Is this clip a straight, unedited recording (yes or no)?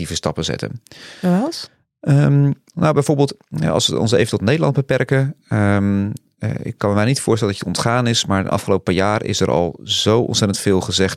yes